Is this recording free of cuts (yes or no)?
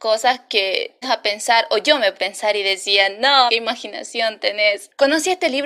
no